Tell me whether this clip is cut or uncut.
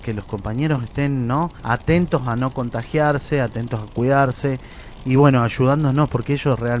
cut